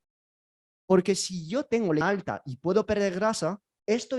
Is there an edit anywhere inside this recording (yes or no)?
yes